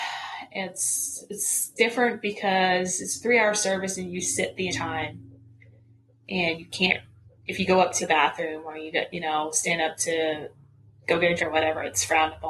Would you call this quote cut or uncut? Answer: cut